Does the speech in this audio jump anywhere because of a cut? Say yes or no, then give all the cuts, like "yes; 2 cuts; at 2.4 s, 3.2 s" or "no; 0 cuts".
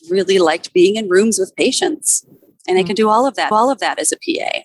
yes; 1 cut; at 3.5 s